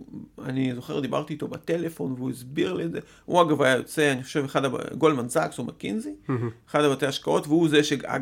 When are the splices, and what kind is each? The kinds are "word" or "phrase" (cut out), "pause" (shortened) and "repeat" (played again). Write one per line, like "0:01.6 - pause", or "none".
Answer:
none